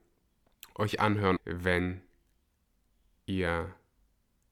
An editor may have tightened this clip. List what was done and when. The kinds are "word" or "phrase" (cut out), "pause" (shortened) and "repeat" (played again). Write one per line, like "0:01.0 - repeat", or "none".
0:01.4 - word